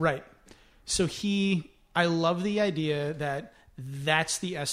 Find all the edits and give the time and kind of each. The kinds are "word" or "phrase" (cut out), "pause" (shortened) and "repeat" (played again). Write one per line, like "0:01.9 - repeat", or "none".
none